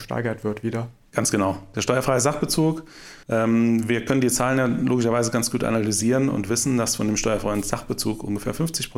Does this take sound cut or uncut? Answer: cut